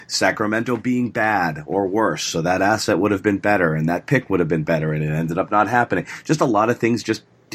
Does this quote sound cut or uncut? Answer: uncut